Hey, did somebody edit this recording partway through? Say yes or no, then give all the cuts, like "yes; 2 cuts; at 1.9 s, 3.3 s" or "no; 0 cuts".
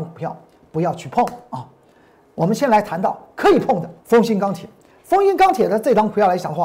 yes; 1 cut; at 4.0 s